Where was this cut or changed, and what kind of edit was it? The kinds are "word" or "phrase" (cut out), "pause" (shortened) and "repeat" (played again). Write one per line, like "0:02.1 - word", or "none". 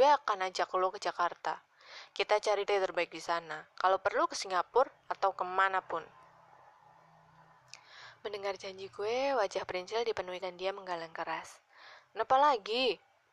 0:02.6 - phrase
0:03.7 - pause
0:10.4 - word